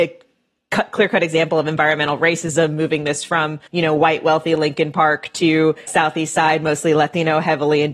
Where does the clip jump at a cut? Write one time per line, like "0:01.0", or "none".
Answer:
0:03.7
0:05.9